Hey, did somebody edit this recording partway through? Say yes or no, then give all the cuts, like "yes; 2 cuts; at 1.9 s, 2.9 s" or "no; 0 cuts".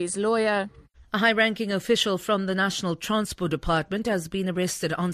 yes; 1 cut; at 0.9 s